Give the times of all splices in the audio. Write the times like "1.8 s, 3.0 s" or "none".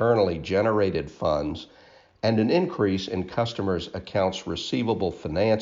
none